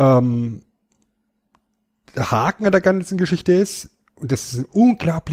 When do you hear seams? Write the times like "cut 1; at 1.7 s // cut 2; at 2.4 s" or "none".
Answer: none